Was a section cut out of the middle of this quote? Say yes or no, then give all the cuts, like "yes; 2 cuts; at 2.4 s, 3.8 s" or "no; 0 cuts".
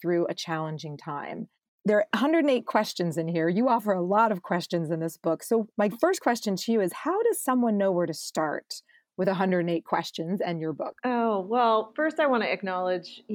yes; 2 cuts; at 5.7 s, 11.0 s